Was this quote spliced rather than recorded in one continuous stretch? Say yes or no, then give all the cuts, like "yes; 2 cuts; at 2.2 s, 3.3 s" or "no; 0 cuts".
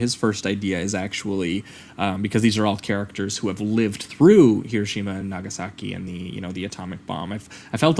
no; 0 cuts